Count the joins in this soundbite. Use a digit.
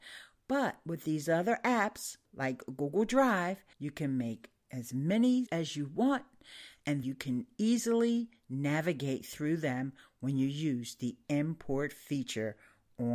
4